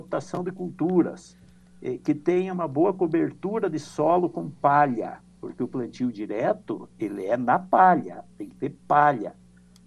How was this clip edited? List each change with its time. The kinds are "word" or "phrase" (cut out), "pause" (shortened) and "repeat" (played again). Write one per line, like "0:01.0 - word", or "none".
none